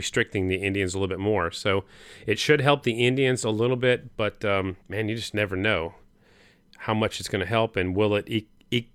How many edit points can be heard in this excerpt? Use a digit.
1